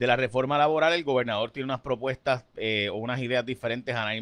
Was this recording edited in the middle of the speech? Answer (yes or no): no